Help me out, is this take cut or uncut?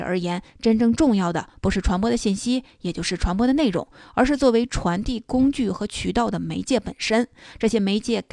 uncut